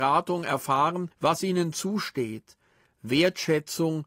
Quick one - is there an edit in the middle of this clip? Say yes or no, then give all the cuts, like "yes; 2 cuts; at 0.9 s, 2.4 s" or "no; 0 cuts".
yes; 1 cut; at 1.1 s